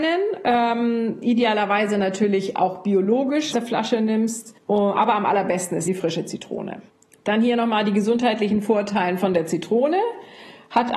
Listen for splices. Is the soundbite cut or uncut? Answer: cut